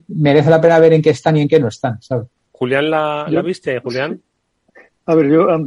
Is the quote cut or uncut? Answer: uncut